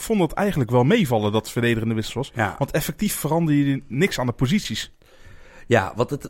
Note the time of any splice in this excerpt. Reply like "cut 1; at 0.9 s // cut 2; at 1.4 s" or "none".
none